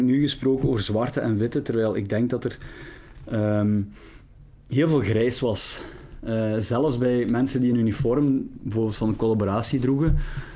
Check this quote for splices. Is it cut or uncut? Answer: uncut